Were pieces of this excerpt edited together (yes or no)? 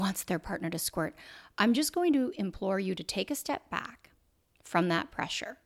no